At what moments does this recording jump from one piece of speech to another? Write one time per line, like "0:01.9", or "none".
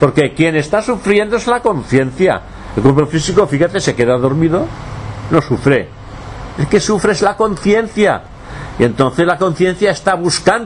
none